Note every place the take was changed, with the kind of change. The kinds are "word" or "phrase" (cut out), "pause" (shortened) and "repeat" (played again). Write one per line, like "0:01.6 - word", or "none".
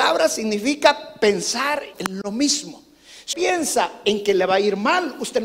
0:01.9 - phrase
0:03.3 - word